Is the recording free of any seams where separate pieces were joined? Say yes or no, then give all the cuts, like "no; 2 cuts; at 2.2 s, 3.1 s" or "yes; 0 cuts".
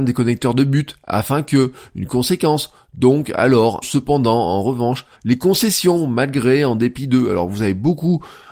no; 2 cuts; at 3.8 s, 5.1 s